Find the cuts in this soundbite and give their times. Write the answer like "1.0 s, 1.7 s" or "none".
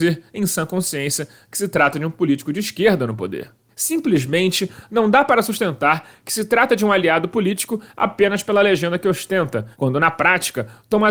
3.7 s, 9.7 s